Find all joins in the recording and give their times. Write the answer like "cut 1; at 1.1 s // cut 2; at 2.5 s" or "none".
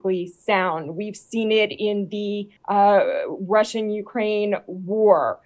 cut 1; at 2.6 s